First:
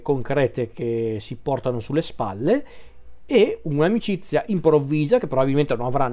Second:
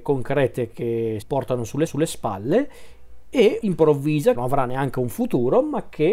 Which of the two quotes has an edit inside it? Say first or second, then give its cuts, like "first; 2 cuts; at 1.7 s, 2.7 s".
second; 4 cuts; at 1.2 s, 1.9 s, 3.6 s, 4.3 s